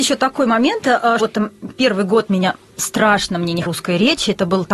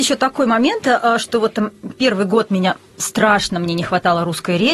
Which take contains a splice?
first; 2 cuts; at 1.2 s, 3.7 s

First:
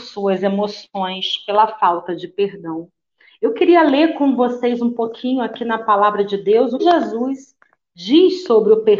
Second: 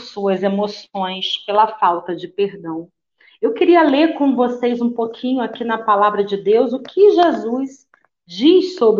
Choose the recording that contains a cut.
first; 1 cut; at 6.8 s

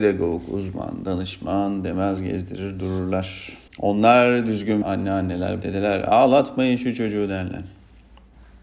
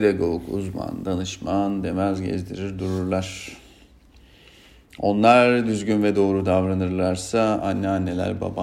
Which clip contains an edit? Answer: first; 3 cuts; at 3.7 s, 4.8 s, 5.6 s

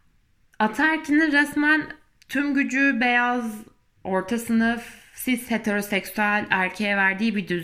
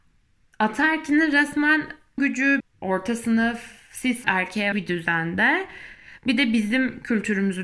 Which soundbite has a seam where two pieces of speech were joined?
second; 4 cuts; at 2.2 s, 2.6 s, 4.2 s, 4.7 s

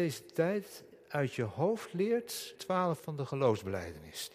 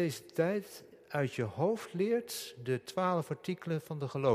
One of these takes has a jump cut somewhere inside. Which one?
first; 2 cuts; at 2.6 s, 3.0 s

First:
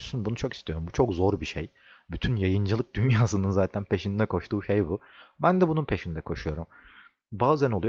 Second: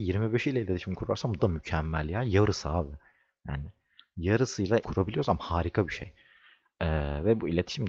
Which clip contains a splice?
second; 2 cuts; at 1.4 s, 4.8 s

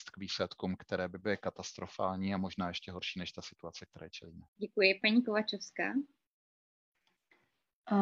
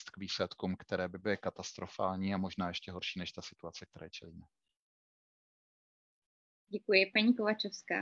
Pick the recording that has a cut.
first; 1 cut; at 4.5 s

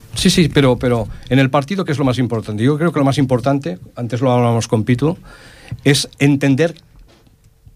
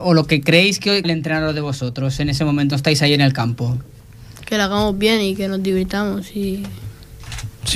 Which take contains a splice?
second; 2 cuts; at 1.0 s, 2.7 s

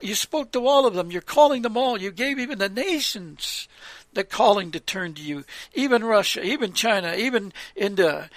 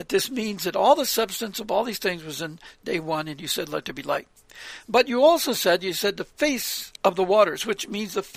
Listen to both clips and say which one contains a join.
second; 1 cut; at 7.0 s

